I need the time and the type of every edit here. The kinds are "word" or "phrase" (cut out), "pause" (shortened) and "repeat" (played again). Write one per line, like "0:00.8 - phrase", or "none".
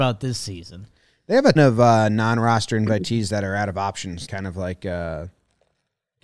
0:01.6 - word
0:04.3 - word